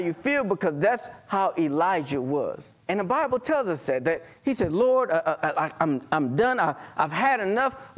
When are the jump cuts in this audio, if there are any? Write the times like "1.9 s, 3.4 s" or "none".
2.8 s, 5.4 s